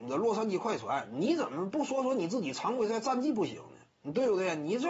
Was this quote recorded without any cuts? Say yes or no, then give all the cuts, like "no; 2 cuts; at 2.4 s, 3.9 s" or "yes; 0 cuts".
no; 1 cut; at 3.9 s